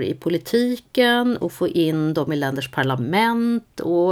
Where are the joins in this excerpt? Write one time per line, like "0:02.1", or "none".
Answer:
none